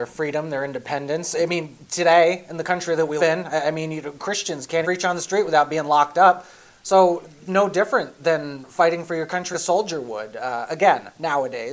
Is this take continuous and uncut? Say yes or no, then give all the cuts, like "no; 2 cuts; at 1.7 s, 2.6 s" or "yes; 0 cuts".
no; 4 cuts; at 3.2 s, 4.8 s, 7.5 s, 9.5 s